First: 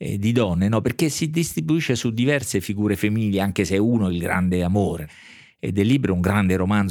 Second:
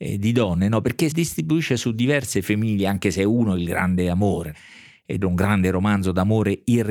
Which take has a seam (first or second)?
second